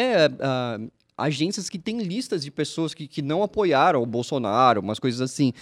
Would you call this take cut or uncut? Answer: uncut